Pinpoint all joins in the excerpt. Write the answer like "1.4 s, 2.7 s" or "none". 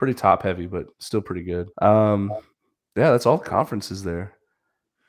0.9 s, 1.7 s

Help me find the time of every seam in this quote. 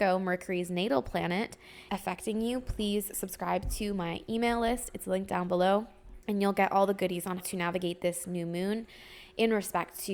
1.9 s, 6.2 s, 7.4 s

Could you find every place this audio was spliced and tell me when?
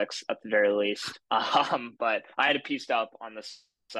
1.2 s, 2.3 s

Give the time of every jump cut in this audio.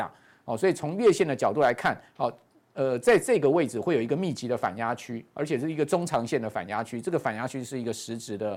2.1 s

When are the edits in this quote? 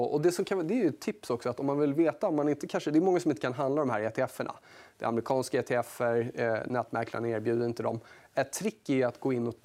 none

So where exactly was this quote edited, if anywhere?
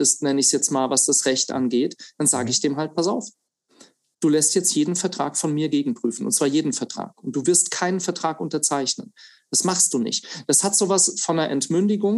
none

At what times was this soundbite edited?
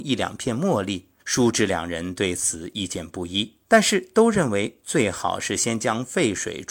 1.2 s, 3.6 s

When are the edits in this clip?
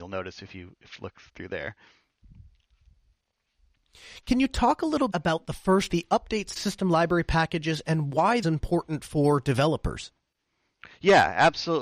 1.3 s, 5.1 s, 5.9 s, 6.6 s, 8.4 s

